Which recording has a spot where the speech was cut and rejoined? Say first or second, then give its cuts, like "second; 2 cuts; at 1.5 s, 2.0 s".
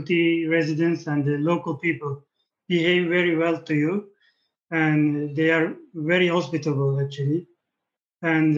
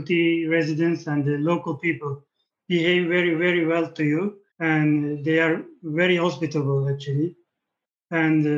second; 2 cuts; at 3.4 s, 4.5 s